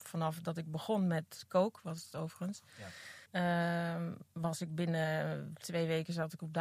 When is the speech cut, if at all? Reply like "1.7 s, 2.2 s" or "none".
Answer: 3.2 s